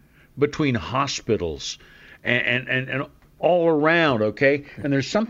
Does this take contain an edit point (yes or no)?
no